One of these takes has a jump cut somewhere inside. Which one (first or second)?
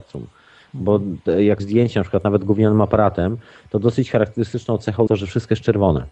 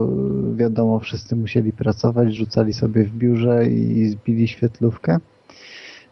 first